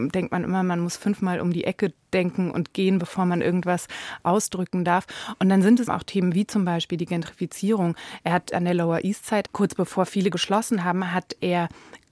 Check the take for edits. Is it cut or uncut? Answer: cut